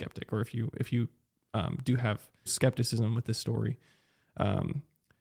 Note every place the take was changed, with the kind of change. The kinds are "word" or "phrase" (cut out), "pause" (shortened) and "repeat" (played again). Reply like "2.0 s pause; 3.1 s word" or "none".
2.5 s phrase